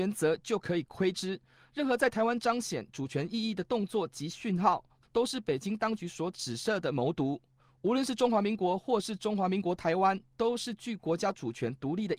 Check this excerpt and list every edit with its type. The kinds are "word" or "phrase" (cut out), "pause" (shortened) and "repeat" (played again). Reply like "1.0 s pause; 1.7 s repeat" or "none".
none